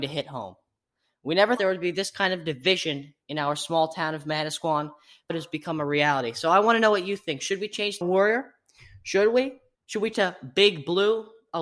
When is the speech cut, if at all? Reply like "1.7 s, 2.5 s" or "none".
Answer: 1.6 s, 3.2 s, 5.3 s, 8.0 s, 9.7 s, 10.1 s